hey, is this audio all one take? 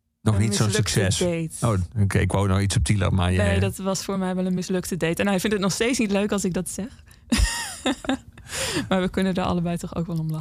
yes; 0 cuts

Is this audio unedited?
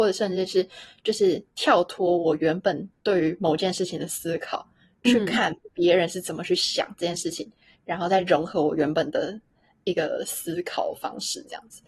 yes; 0 cuts

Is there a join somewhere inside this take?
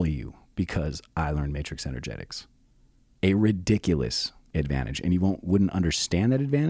no; 0 cuts

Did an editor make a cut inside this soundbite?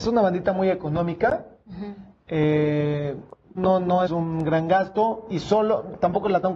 yes; 2 cuts; at 3.6 s, 4.1 s

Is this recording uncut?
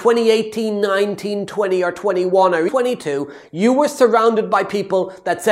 no; 1 cut; at 2.7 s

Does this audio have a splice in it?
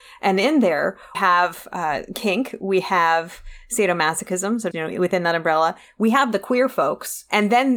yes; 2 cuts; at 1.1 s, 4.7 s

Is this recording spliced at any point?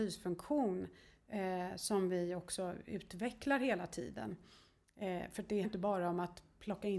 yes; 1 cut; at 5.6 s

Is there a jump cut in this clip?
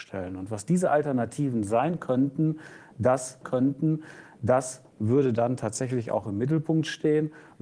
yes; 1 cut; at 3.4 s

